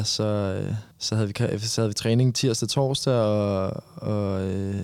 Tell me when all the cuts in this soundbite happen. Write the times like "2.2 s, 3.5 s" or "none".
0.9 s